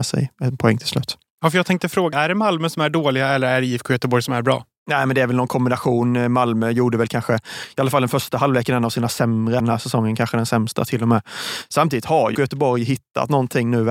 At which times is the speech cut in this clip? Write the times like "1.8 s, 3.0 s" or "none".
2.1 s, 9.6 s, 12.3 s

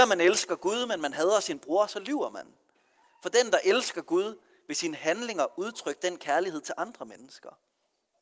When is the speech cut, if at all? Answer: none

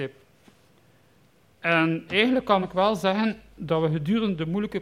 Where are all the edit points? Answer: none

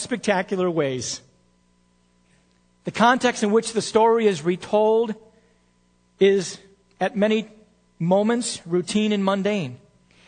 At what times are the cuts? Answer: none

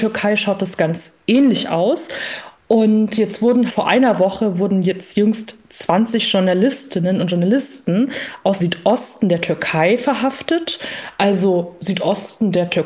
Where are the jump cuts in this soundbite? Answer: 3.7 s, 8.6 s

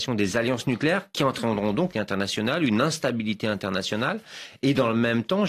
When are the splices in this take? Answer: 1.9 s

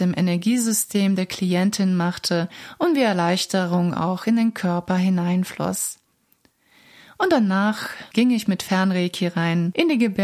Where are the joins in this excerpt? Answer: none

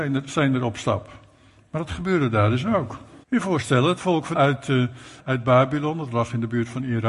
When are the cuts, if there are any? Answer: 3.2 s, 4.3 s, 5.2 s

